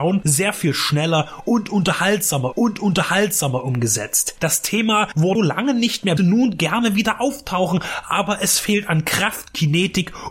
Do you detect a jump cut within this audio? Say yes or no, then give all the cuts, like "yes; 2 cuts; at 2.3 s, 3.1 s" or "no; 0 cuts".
yes; 3 cuts; at 2.5 s, 5.3 s, 6.2 s